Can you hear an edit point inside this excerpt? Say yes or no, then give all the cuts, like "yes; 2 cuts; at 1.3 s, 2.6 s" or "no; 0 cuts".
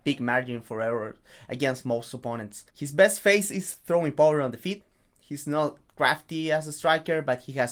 yes; 1 cut; at 2.7 s